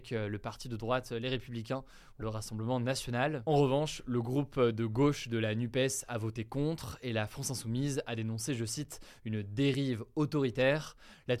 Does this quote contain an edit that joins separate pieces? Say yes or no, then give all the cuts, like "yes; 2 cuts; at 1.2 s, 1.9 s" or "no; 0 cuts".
yes; 1 cut; at 2.2 s